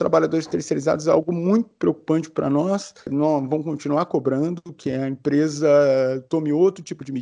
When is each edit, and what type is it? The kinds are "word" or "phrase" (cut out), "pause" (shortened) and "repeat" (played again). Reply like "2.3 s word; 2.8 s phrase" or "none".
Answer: 3.0 s pause